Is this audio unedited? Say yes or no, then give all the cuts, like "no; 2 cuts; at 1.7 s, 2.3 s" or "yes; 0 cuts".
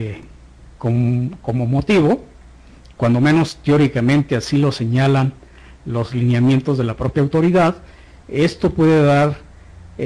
yes; 0 cuts